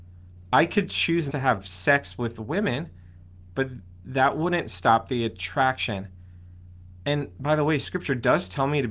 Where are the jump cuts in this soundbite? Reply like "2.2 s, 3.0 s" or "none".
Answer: 1.3 s